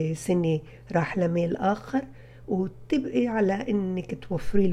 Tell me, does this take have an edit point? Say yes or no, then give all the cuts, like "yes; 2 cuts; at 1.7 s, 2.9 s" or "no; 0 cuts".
no; 0 cuts